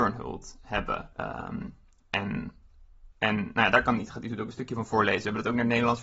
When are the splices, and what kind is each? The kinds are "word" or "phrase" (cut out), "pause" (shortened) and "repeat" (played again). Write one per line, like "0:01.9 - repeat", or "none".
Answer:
0:01.1 - pause
0:03.1 - pause